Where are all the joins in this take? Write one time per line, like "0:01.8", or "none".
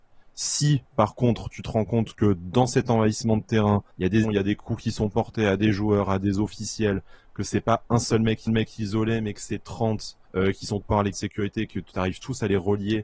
0:03.9
0:04.2
0:08.5
0:10.2
0:10.8
0:11.1